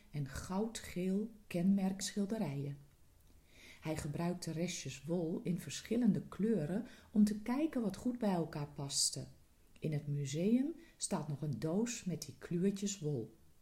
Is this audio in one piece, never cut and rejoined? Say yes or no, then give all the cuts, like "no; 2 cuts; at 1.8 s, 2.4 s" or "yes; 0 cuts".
no; 1 cut; at 2.0 s